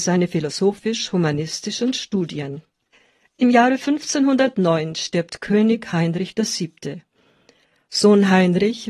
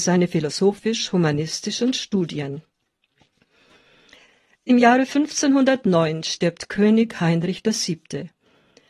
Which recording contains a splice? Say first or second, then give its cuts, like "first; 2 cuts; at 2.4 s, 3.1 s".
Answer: first; 1 cut; at 2.9 s